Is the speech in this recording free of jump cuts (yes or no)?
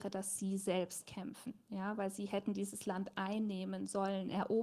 yes